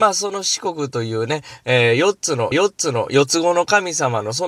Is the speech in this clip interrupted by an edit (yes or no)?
yes